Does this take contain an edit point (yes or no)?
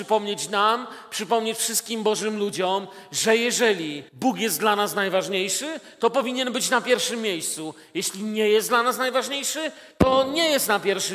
yes